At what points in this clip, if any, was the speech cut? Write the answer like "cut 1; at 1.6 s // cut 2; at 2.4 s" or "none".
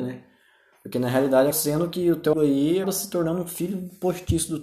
cut 1; at 1.5 s // cut 2; at 2.3 s // cut 3; at 2.8 s